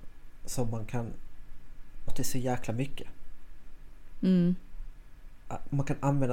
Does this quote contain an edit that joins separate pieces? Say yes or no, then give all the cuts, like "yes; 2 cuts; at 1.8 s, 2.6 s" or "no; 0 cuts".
yes; 1 cut; at 2.1 s